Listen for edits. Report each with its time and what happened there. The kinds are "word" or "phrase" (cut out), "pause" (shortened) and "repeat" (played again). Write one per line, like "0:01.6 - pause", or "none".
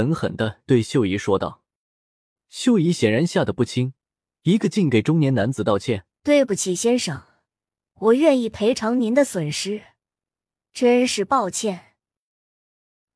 0:06.1 - pause